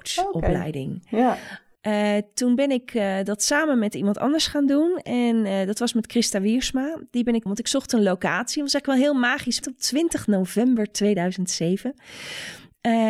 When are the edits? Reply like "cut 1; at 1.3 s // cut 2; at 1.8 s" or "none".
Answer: cut 1; at 7.5 s // cut 2; at 9.6 s